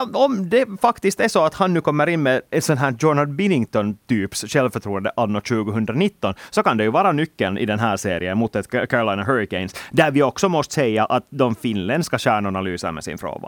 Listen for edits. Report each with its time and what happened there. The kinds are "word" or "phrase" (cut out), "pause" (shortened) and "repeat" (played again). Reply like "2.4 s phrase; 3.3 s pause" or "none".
none